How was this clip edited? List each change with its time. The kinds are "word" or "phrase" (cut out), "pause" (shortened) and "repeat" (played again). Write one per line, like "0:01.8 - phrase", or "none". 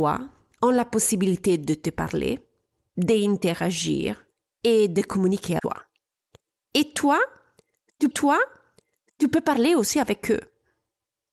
0:05.6 - word
0:08.1 - repeat

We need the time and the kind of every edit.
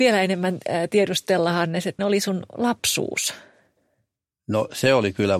0:02.0 - word

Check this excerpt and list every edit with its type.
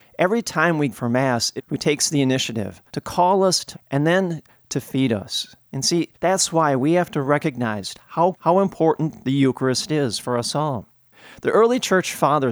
0:00.9 - word
0:01.6 - phrase
0:02.9 - pause
0:03.7 - word
0:05.6 - pause
0:06.1 - pause
0:08.3 - word

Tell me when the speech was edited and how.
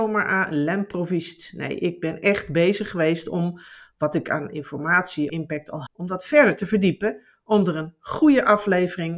0:05.3 - word
0:05.9 - word

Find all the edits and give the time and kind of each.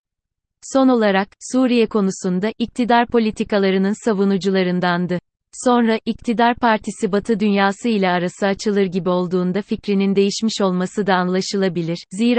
none

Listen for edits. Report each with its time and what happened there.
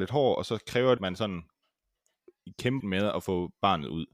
0:01.0 - word
0:02.8 - word

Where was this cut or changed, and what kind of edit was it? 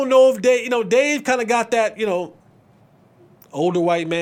none

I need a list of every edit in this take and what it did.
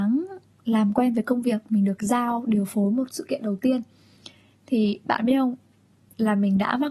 none

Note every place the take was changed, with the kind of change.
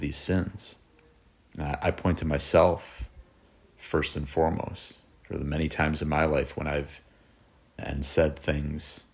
0:07.8 - word

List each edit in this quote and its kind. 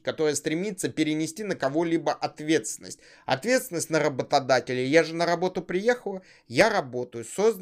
none

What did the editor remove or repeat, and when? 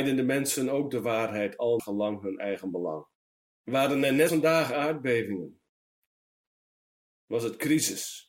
0:01.8 - word
0:03.2 - pause
0:04.3 - word

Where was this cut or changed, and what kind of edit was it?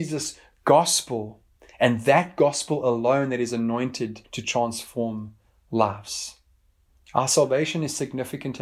0:04.2 - pause

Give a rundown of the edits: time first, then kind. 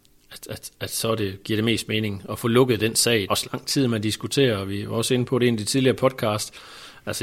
0:03.3 - word

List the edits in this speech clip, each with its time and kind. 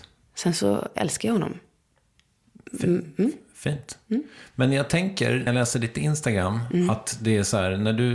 0:05.5 - word

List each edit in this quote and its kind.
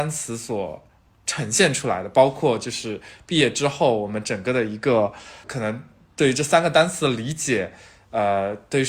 0:05.4 - word

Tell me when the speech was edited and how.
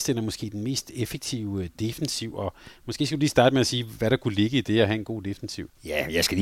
none

